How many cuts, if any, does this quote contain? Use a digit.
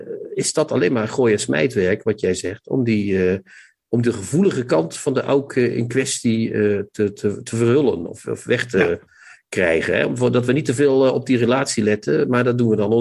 0